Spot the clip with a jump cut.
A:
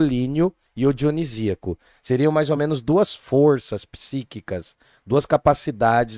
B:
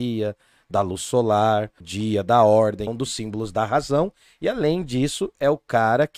B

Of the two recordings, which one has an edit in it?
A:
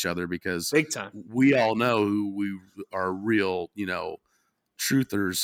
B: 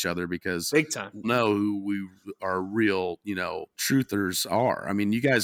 B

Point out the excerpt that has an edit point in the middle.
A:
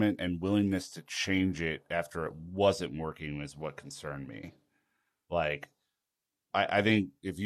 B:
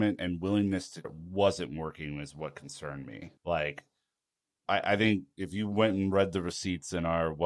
B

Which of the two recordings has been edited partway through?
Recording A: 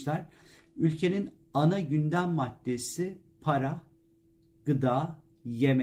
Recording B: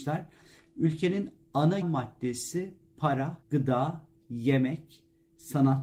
B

